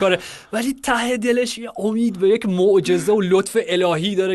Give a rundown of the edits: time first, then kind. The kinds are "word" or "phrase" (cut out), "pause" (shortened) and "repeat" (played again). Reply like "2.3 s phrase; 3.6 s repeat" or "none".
none